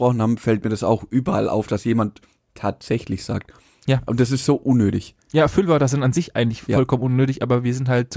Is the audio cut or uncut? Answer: uncut